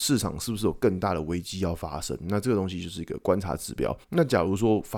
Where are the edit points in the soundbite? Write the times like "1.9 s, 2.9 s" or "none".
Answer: 4.0 s